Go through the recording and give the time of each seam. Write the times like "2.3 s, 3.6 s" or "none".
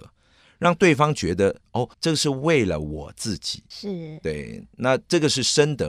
1.9 s